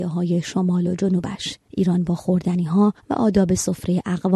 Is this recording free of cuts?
yes; 0 cuts

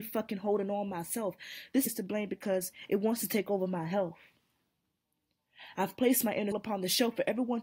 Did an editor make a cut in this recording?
yes; 2 cuts; at 1.9 s, 6.5 s

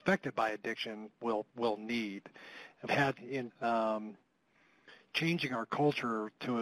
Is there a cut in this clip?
yes; 4 cuts; at 1.2 s, 2.9 s, 3.2 s, 3.5 s

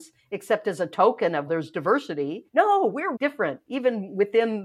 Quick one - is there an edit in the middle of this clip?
yes; 3 cuts; at 1.5 s, 2.5 s, 3.2 s

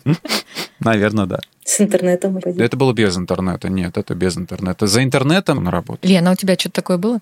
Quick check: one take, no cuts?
no; 2 cuts; at 2.4 s, 5.5 s

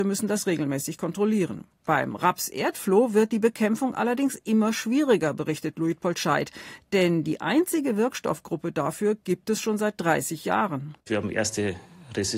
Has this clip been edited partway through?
yes; 2 cuts; at 1.7 s, 11.0 s

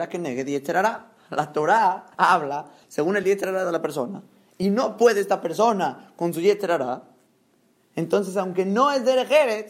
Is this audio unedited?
yes; 0 cuts

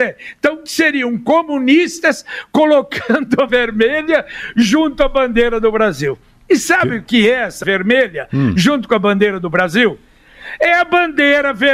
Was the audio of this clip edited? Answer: yes; 2 cuts; at 3.5 s, 7.6 s

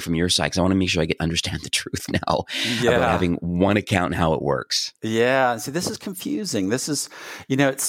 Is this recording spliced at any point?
no; 0 cuts

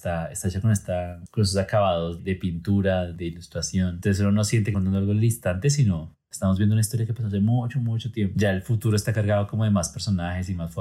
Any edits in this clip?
yes; 3 cuts; at 2.2 s, 3.1 s, 4.7 s

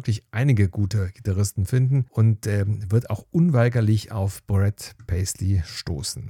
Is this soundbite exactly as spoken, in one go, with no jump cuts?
no; 1 cut; at 2.1 s

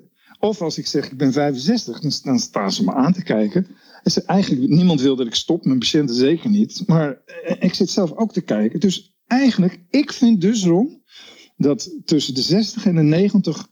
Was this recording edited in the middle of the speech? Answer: no; 0 cuts

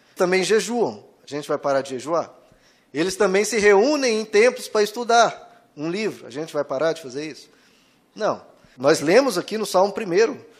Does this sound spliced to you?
no; 0 cuts

